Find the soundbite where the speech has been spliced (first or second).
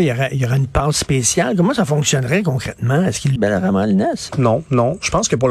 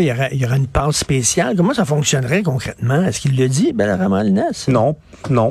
first